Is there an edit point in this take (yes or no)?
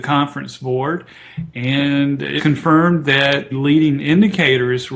yes